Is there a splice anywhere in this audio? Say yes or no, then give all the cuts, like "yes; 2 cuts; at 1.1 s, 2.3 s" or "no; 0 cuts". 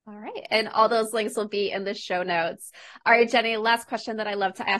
no; 0 cuts